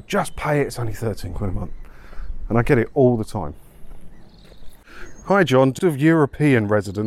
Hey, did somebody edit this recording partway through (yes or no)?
yes